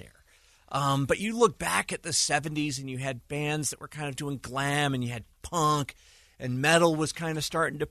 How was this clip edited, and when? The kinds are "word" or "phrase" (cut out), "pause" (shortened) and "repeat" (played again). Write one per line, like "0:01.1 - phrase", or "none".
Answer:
none